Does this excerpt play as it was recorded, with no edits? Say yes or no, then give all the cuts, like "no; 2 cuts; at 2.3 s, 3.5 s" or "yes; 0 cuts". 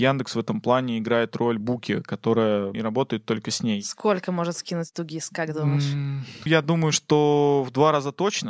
no; 3 cuts; at 1.6 s, 2.7 s, 6.5 s